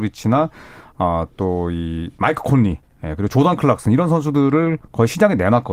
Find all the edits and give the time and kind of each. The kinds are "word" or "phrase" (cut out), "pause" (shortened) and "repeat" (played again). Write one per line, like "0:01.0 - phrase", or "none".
none